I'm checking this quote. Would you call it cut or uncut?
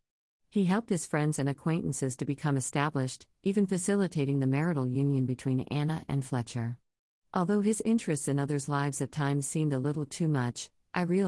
uncut